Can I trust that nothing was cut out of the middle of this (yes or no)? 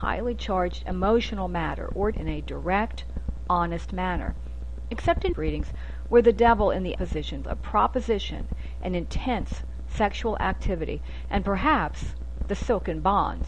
no